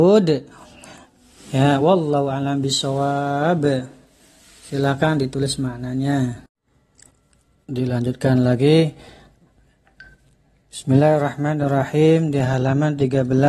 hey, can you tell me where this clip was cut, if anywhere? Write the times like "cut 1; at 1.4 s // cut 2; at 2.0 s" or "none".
none